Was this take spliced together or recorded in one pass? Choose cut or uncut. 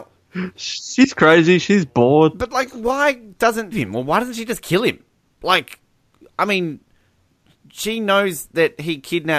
cut